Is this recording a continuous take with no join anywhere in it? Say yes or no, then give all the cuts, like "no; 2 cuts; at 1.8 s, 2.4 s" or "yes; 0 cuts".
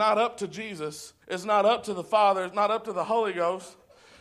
no; 1 cut; at 1.2 s